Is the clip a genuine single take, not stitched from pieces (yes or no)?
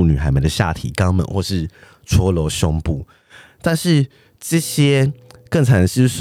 yes